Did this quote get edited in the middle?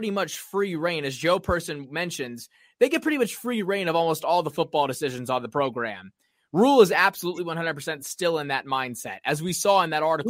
no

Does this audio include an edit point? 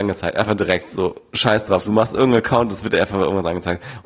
no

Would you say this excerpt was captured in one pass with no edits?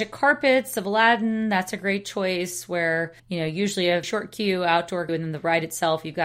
no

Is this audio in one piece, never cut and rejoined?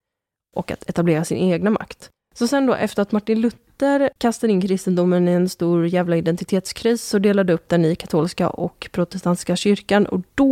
no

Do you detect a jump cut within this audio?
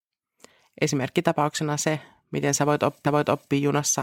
yes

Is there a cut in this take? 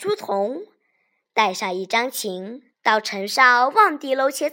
yes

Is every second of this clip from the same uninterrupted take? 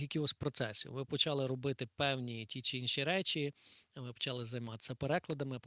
yes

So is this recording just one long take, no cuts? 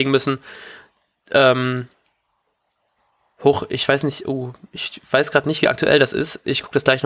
yes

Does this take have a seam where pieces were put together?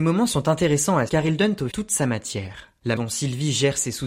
yes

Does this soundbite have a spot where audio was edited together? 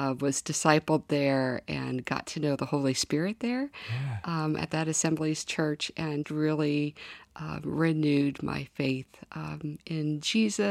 yes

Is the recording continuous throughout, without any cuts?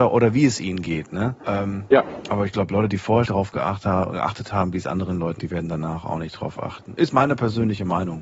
no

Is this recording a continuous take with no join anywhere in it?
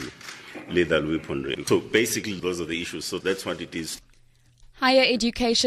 yes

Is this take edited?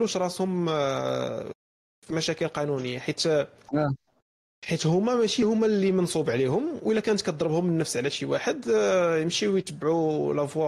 no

